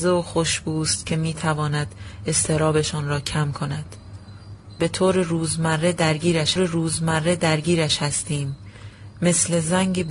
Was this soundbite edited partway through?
yes; 2 cuts; at 4.8 s, 6.6 s

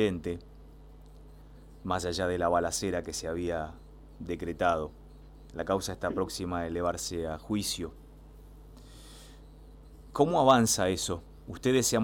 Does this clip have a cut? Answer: no; 0 cuts

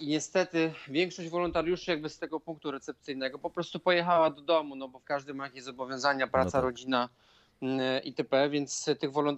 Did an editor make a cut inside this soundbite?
yes; 2 cuts; at 2.2 s, 5.0 s

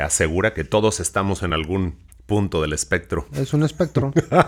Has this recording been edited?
no; 0 cuts

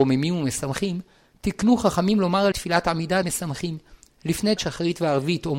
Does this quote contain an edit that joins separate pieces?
yes; 3 cuts; at 2.5 s, 3.2 s, 4.6 s

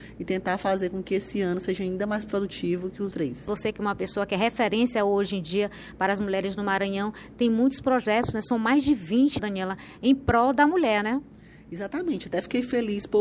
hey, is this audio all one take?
no; 2 cuts; at 3.1 s, 9.4 s

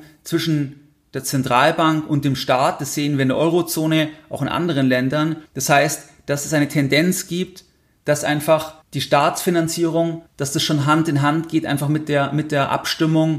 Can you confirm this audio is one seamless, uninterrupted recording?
no; 3 cuts; at 5.5 s, 8.8 s, 10.3 s

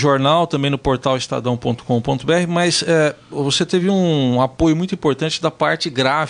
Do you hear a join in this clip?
no; 0 cuts

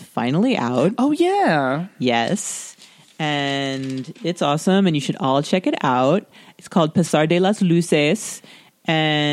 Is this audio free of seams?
yes; 0 cuts

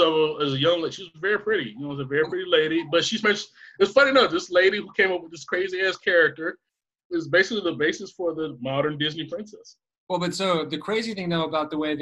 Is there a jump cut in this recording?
yes; 1 cut; at 3.2 s

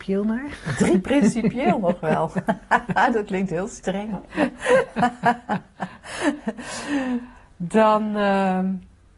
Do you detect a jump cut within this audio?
no; 0 cuts

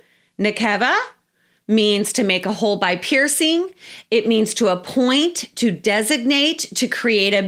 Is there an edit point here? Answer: no; 0 cuts

